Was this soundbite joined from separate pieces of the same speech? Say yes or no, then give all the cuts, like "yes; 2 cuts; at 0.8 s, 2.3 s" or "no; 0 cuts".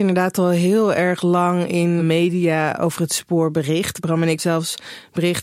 yes; 2 cuts; at 2.0 s, 4.4 s